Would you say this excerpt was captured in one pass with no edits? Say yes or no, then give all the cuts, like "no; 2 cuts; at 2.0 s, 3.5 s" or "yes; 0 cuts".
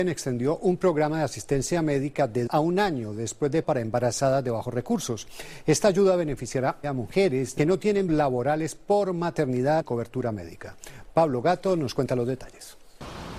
no; 6 cuts; at 2.5 s, 3.6 s, 6.8 s, 7.6 s, 8.1 s, 9.8 s